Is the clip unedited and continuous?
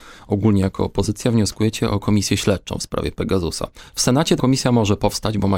no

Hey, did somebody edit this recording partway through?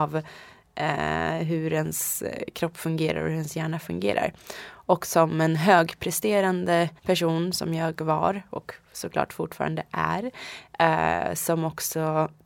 yes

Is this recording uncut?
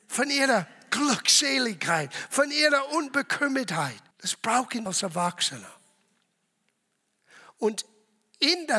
no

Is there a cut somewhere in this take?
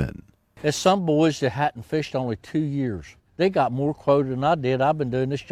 yes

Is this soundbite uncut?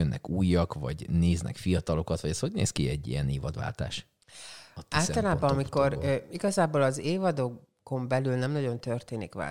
yes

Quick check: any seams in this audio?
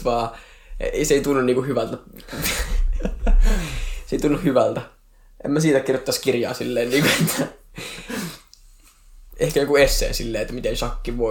no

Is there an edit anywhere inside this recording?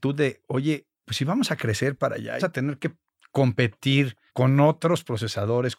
yes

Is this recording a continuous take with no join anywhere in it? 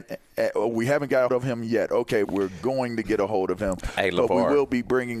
no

